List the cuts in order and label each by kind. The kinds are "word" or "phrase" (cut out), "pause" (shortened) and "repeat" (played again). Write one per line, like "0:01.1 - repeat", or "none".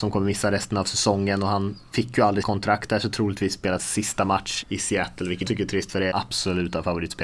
0:02.4 - word
0:03.8 - word
0:04.6 - word
0:05.5 - word
0:06.1 - phrase